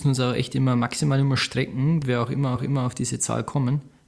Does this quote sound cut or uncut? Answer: cut